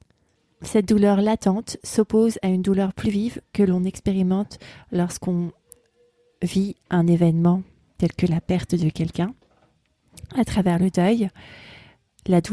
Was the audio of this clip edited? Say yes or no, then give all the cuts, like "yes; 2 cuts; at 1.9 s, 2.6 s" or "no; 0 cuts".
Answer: no; 0 cuts